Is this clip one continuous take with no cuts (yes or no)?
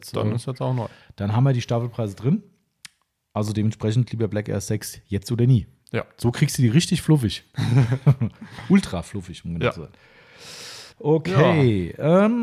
no